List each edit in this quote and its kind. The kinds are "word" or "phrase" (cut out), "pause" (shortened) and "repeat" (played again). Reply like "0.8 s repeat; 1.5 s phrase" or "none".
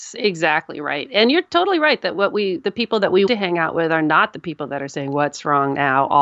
3.3 s word